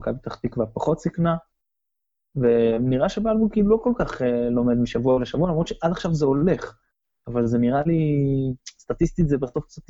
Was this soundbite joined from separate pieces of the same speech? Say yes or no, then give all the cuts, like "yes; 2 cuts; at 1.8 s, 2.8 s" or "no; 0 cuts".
no; 0 cuts